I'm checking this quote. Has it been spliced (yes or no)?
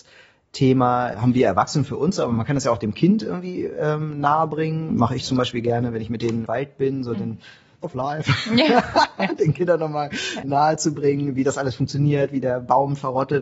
yes